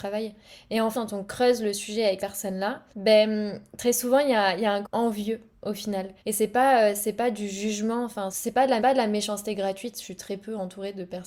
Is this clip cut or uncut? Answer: cut